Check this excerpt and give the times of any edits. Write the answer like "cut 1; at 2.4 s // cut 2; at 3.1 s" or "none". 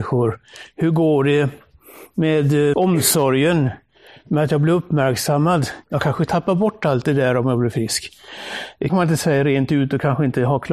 cut 1; at 2.7 s // cut 2; at 5.8 s // cut 3; at 8.9 s